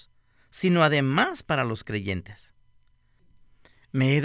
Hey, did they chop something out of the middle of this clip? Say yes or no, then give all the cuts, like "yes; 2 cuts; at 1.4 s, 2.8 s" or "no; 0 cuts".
no; 0 cuts